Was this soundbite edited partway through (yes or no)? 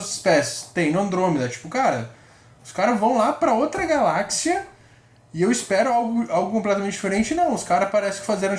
no